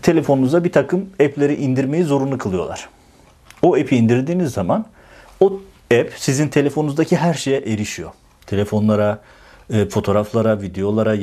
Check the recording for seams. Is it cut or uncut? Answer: uncut